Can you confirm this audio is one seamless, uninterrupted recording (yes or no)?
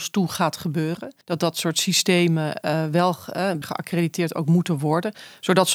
no